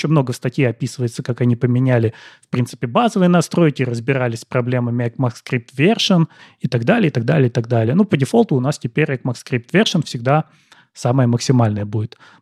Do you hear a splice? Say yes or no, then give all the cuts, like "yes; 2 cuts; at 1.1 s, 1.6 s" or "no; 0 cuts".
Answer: no; 0 cuts